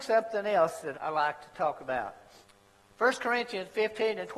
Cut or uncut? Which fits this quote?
cut